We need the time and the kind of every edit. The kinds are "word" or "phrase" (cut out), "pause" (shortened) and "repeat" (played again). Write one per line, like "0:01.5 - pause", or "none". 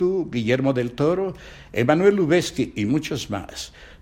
none